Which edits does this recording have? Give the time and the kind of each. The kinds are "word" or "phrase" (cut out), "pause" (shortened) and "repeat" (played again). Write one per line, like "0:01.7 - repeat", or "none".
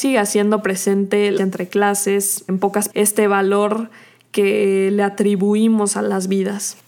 0:01.4 - word
0:02.5 - word
0:02.9 - word

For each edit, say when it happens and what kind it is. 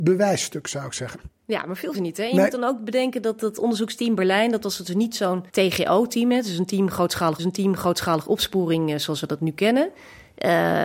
0:01.4 - pause
0:01.9 - phrase
0:05.5 - pause
0:07.4 - repeat

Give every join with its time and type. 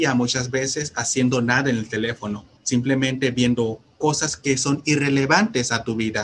0:02.6 - pause

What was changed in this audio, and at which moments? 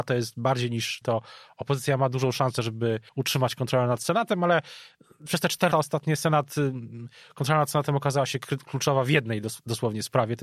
0:01.0 - phrase
0:03.1 - pause
0:05.7 - word

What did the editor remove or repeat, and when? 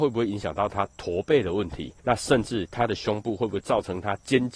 0:02.0 - pause

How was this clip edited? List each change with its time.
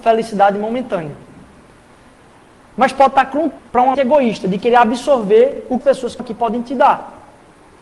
0:03.6 - word
0:03.9 - word
0:05.8 - phrase
0:06.2 - word

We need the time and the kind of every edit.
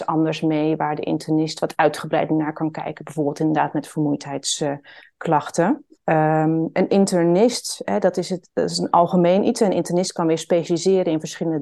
0:05.9 - pause
0:07.8 - word

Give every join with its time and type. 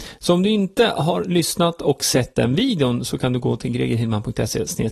none

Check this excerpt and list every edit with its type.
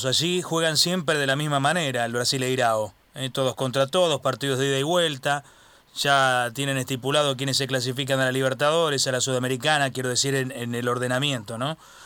none

